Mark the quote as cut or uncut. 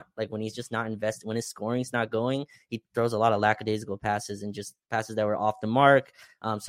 uncut